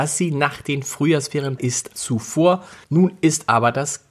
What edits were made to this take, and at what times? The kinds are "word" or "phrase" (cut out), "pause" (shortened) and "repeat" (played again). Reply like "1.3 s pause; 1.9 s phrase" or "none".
1.6 s word; 1.9 s word; 2.8 s pause